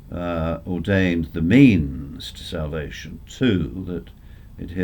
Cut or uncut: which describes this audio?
uncut